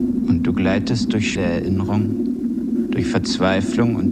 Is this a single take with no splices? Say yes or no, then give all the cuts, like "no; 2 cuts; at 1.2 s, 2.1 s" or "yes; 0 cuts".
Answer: no; 1 cut; at 1.4 s